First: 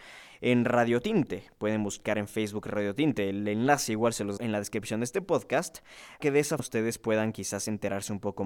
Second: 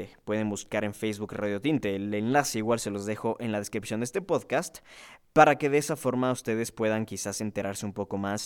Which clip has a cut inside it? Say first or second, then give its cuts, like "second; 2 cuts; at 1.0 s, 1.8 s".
first; 3 cuts; at 4.4 s, 6.2 s, 6.6 s